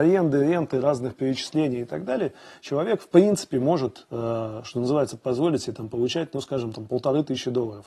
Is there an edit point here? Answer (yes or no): no